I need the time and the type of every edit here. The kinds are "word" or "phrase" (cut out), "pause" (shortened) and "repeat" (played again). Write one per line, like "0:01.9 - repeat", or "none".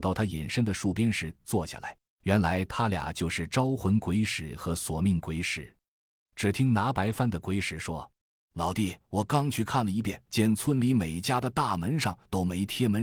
0:02.1 - pause
0:08.2 - pause
0:09.0 - pause
0:10.3 - pause